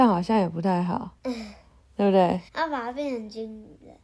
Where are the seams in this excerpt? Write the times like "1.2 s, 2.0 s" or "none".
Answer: 1.2 s, 2.5 s